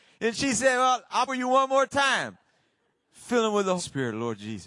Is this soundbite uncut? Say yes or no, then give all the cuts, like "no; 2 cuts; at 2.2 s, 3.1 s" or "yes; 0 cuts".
no; 2 cuts; at 1.3 s, 3.8 s